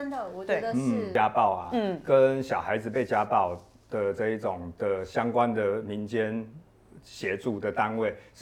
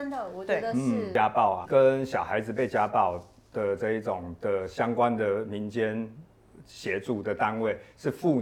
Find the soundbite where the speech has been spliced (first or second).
second